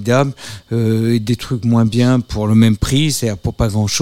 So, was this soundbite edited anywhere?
no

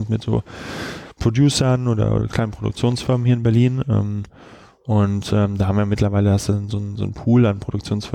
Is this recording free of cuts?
yes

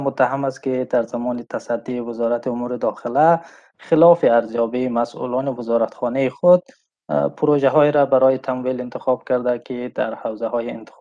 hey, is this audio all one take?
yes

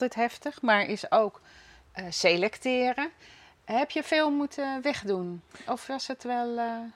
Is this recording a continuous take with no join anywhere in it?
yes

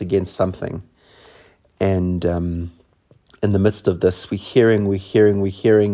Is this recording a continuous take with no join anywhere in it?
yes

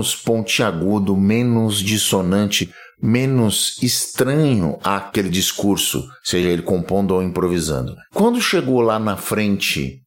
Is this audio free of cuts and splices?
yes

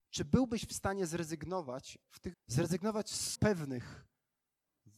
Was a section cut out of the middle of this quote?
yes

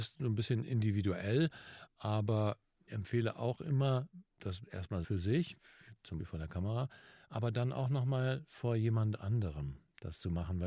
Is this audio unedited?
no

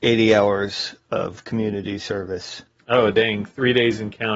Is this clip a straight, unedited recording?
yes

